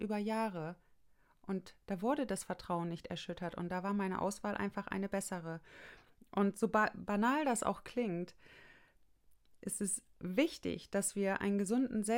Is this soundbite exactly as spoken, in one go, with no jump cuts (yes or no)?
yes